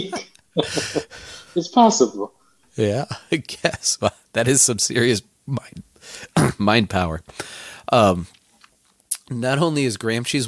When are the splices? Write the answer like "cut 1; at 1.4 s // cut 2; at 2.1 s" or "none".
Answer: none